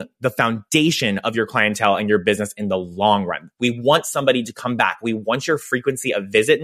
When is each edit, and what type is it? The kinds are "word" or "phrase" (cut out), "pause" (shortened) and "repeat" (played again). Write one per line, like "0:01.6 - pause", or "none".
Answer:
none